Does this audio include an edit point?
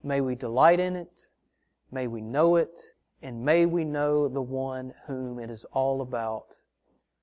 yes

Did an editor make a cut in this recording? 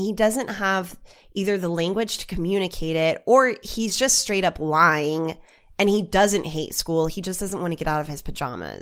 no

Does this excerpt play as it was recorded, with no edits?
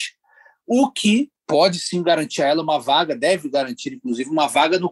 no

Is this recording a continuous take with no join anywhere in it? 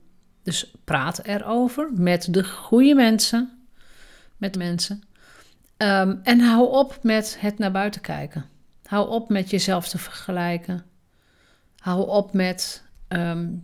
no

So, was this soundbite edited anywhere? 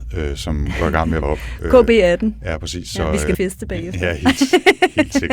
yes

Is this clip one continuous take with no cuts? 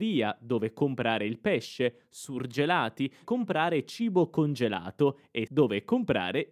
no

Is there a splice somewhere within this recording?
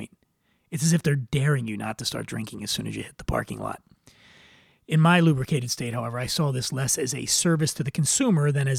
no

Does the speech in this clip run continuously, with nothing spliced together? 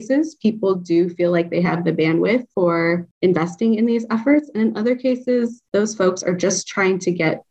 yes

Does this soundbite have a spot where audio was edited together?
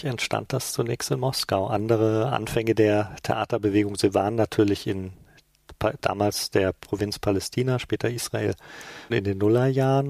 yes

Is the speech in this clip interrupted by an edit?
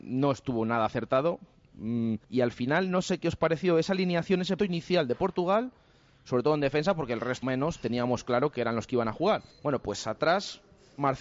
yes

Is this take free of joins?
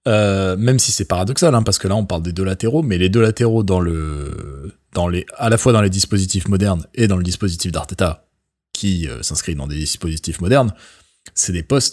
yes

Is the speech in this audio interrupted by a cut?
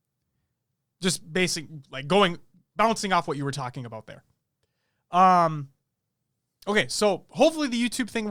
no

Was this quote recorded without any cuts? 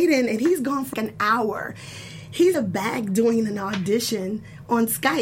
no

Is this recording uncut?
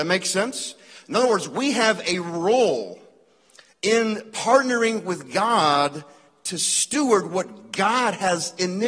yes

